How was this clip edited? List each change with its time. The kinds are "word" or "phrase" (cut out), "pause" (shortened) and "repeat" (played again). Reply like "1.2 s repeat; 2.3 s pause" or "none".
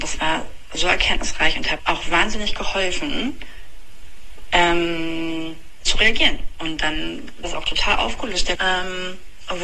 1.8 s word; 5.9 s word; 7.4 s word; 8.5 s word